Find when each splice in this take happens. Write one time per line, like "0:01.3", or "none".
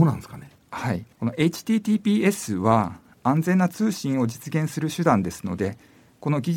0:01.1